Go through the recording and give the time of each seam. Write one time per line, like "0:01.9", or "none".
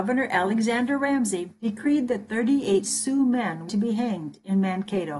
0:01.6
0:02.8
0:03.7